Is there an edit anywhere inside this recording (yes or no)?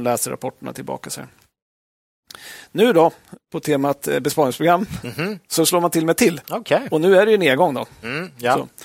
yes